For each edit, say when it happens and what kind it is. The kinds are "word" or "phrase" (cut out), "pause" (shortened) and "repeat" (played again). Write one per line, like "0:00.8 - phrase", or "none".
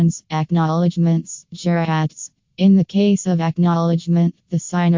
none